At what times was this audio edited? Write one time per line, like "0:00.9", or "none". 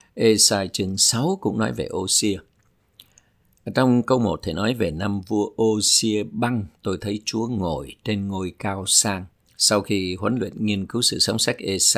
0:09.5

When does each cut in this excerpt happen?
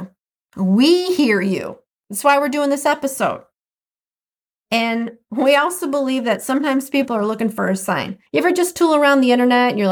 0:08.3

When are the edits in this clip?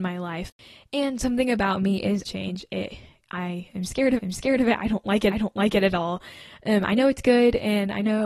0:02.3
0:04.2
0:05.3

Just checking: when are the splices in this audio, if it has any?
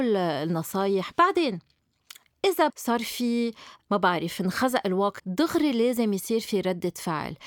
0:01.1
0:02.7
0:05.2

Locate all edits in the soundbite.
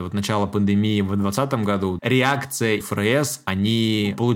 0:02.0
0:02.8

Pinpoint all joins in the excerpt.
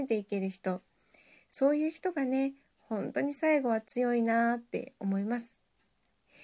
none

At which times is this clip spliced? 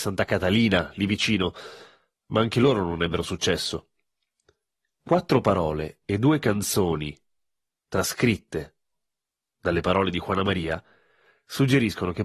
none

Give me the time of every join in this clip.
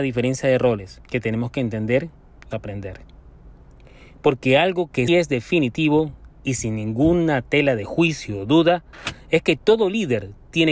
0:01.0
0:02.5
0:05.1

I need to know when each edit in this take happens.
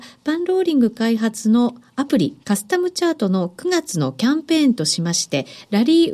0:02.4

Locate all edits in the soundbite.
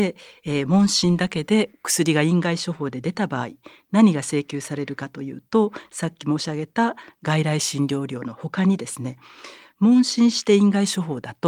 none

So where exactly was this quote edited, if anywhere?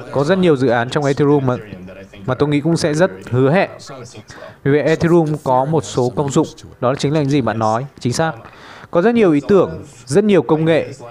0:06.7

